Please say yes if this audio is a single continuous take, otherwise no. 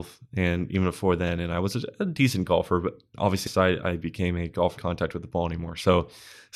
no